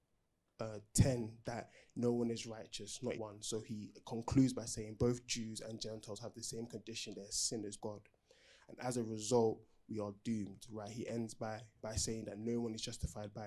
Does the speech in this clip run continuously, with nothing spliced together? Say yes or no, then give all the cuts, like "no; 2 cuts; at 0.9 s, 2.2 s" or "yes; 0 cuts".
no; 3 cuts; at 3.1 s, 7.8 s, 11.8 s